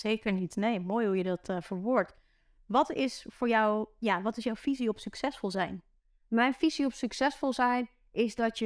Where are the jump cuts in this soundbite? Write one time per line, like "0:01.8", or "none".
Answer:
none

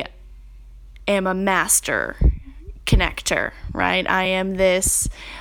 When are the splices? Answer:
none

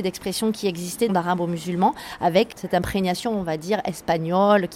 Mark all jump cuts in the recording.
0:01.1
0:02.5

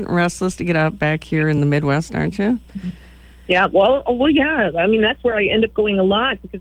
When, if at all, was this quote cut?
none

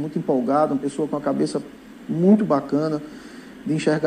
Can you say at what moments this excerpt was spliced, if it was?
none

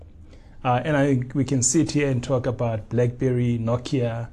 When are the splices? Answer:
none

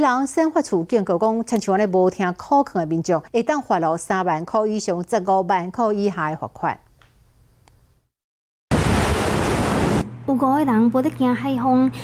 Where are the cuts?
0:03.3

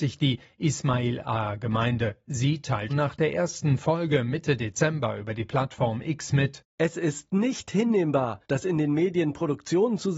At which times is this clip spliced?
0:02.9
0:08.4

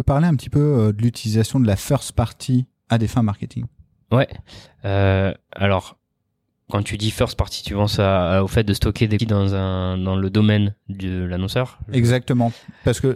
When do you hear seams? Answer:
0:09.2

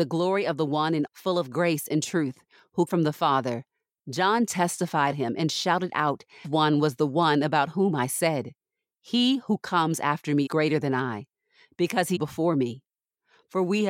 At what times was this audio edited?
0:01.1
0:02.9
0:05.1
0:06.4
0:10.5
0:12.2

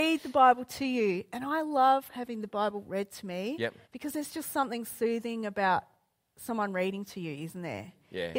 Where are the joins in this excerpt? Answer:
0:03.8

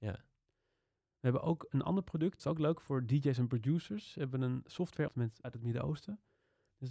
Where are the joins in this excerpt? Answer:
0:02.4
0:05.1
0:05.4

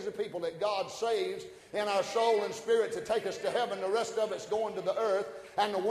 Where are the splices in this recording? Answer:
none

